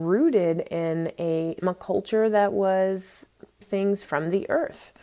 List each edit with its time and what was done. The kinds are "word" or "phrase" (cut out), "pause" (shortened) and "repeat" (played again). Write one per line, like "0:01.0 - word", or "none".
0:01.6 - word
0:03.6 - word